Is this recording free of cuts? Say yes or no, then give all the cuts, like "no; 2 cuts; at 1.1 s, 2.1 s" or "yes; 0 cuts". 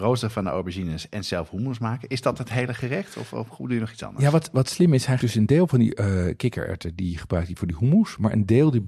no; 1 cut; at 5.2 s